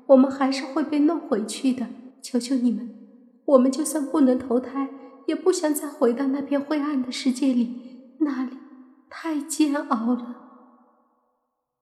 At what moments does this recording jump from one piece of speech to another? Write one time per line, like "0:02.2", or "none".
0:02.1